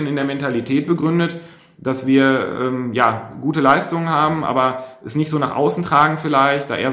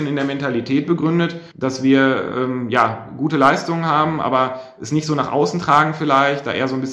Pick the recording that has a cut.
second; 1 cut; at 1.5 s

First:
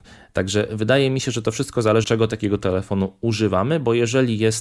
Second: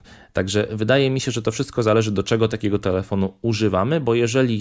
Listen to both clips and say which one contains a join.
first; 1 cut; at 2.0 s

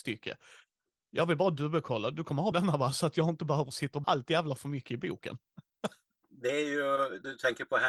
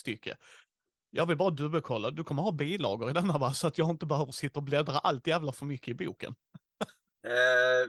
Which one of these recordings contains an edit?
first; 3 cuts; at 2.5 s, 4.0 s, 6.2 s

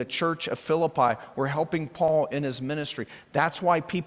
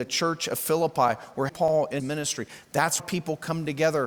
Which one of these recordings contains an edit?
second; 3 cuts; at 1.5 s, 2.0 s, 3.0 s

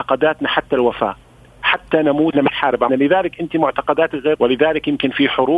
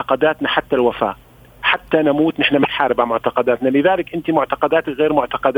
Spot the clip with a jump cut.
first; 3 cuts; at 2.3 s, 2.9 s, 4.3 s

